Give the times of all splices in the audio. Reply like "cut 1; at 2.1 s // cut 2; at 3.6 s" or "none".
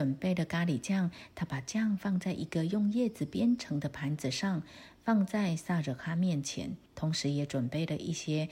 cut 1; at 6.9 s